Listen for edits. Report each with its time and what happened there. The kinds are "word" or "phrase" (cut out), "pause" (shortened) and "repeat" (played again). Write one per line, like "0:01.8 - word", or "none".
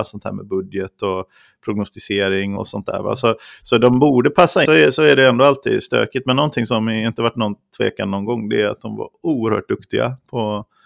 0:02.6 - word
0:04.6 - phrase